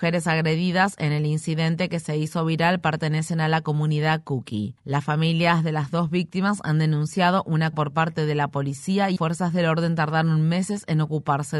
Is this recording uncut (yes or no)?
no